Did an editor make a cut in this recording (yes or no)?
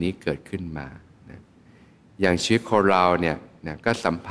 no